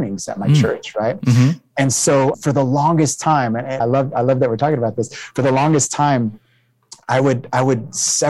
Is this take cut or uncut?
cut